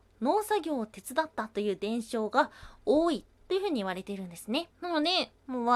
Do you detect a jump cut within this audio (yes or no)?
yes